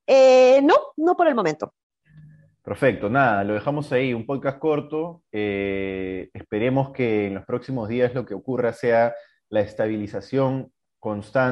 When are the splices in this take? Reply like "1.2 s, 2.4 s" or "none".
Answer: none